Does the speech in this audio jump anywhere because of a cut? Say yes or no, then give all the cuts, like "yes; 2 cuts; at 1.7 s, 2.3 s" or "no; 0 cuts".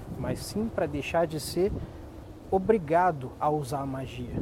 no; 0 cuts